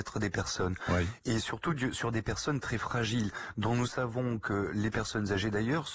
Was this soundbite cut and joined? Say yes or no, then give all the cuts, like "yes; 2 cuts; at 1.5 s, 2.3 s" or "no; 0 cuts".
no; 0 cuts